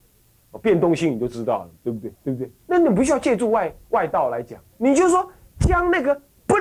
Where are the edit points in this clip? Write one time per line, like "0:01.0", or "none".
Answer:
0:01.8
0:02.1
0:04.7